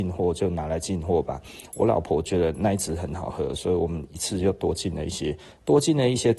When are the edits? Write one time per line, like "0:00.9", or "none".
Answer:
none

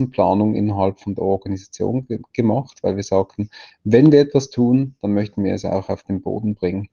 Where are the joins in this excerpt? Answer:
none

